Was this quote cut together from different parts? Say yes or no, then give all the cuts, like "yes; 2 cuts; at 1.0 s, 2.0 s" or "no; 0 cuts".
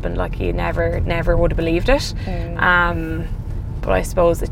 no; 0 cuts